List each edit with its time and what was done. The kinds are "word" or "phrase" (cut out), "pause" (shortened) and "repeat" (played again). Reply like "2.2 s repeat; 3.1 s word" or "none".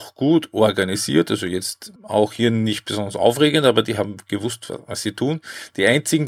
2.0 s pause